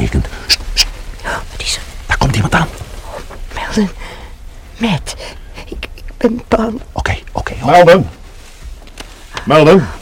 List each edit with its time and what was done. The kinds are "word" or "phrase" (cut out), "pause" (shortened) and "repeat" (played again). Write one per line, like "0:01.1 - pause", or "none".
none